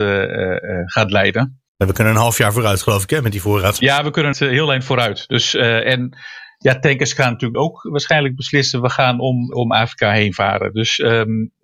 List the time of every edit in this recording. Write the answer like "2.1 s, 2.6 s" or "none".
1.7 s, 4.3 s, 7.5 s, 9.5 s

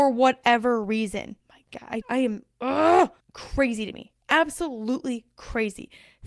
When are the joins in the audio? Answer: 1.4 s, 2.0 s, 3.2 s

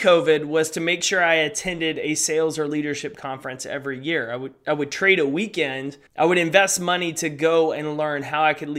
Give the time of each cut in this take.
6.1 s

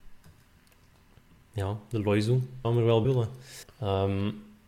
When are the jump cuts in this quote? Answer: 2.6 s, 3.0 s, 3.6 s

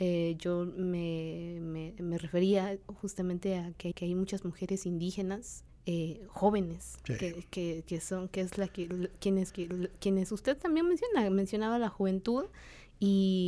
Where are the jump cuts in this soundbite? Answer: 3.9 s, 5.7 s, 9.5 s

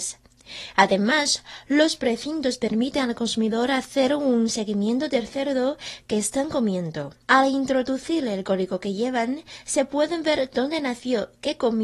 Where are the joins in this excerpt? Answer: 7.2 s

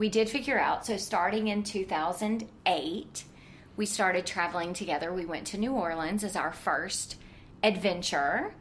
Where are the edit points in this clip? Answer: none

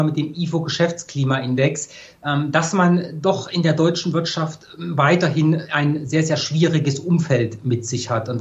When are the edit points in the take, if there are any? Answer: none

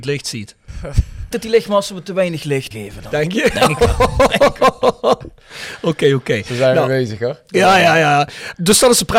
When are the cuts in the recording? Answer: 1.3 s

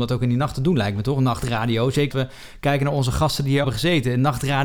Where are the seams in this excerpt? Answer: 2.1 s, 3.6 s

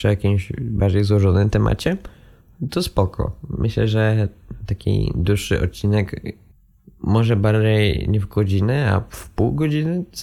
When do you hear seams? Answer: none

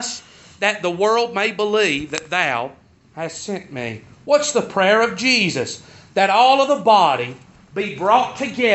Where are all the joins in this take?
none

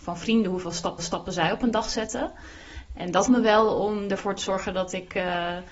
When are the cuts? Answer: 1.0 s, 3.3 s

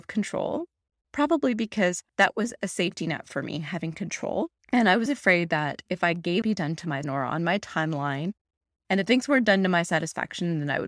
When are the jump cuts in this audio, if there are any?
2.1 s, 4.6 s, 5.1 s, 6.4 s, 7.0 s

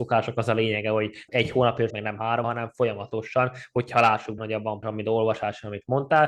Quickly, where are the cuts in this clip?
1.3 s, 1.9 s, 2.4 s, 4.4 s, 4.8 s

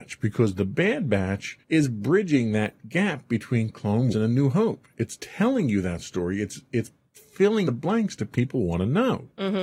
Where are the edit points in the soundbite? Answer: 1.6 s, 4.1 s, 7.7 s

